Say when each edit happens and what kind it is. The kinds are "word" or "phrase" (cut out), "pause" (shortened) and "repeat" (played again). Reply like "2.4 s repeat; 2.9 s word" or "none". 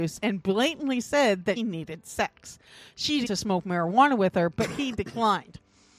1.6 s word; 3.2 s phrase